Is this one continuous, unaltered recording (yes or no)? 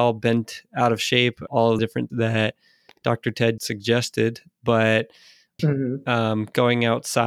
no